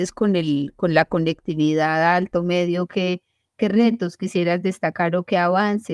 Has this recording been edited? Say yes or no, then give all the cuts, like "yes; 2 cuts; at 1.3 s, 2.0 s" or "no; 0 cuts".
no; 0 cuts